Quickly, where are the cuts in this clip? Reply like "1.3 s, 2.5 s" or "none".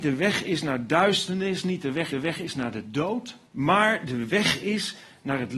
2.1 s, 3.5 s